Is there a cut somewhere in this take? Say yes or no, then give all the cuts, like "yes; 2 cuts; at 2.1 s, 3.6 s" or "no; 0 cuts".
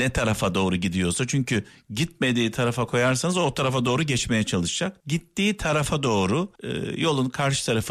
yes; 3 cuts; at 1.7 s, 5.0 s, 6.6 s